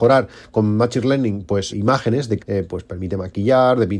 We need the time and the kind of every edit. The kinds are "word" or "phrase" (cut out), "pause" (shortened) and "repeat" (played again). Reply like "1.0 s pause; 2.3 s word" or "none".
1.7 s word; 2.4 s word